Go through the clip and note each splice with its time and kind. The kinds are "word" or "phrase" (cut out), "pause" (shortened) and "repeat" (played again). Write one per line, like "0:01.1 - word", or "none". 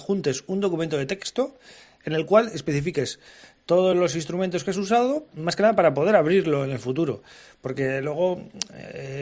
none